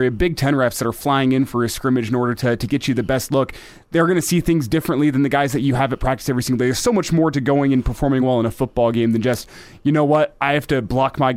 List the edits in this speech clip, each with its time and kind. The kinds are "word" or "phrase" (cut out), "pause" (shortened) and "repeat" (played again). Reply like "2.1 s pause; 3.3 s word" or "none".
none